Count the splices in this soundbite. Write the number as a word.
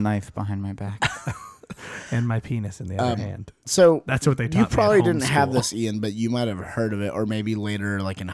zero